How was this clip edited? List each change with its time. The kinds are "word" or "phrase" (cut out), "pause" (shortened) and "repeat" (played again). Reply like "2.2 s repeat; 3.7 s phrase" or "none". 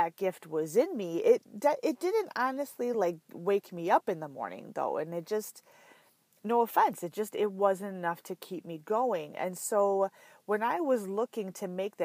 none